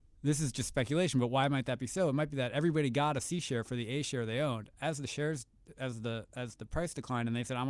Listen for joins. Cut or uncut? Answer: uncut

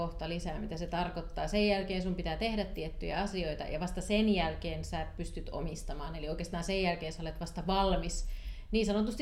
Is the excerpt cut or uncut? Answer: uncut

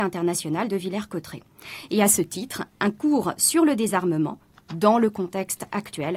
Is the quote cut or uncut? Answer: uncut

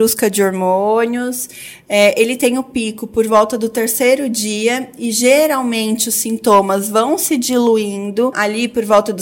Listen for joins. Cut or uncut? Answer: cut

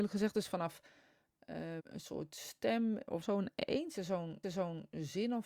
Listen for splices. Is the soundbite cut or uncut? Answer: cut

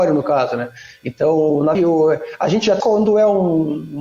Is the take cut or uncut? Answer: cut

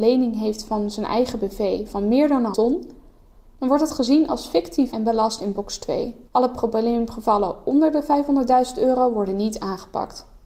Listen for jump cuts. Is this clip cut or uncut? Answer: cut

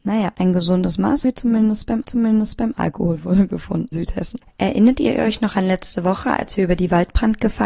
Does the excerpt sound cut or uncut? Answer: cut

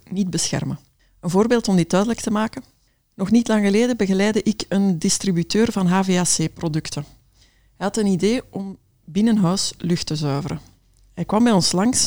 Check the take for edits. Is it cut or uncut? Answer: uncut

